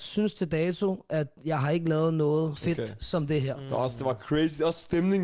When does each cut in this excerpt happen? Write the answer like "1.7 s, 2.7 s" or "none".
2.6 s

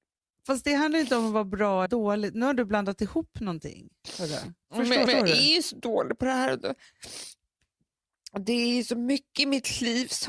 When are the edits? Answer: 1.9 s, 4.6 s, 5.1 s

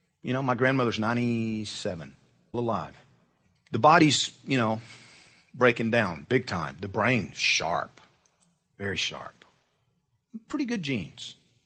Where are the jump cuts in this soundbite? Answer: 2.5 s

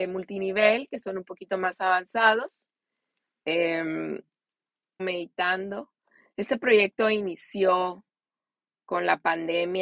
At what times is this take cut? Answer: 5.0 s

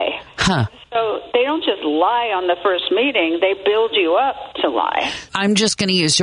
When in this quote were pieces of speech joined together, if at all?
5.3 s

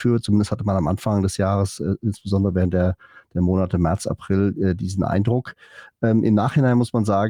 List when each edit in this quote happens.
none

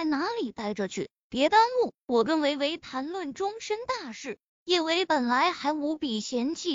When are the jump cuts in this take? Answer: 4.5 s

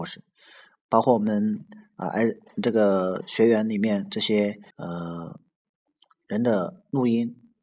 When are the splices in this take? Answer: 4.7 s

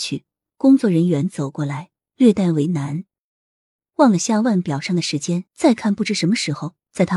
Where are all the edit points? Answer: 5.5 s

